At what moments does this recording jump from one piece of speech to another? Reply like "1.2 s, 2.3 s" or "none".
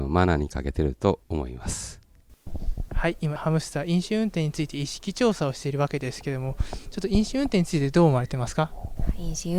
1.2 s, 3.4 s